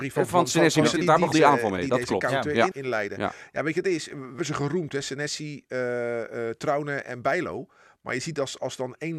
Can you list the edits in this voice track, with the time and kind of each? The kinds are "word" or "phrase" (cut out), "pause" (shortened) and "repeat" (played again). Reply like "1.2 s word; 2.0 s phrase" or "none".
1.0 s word; 1.3 s word; 2.7 s word; 4.4 s word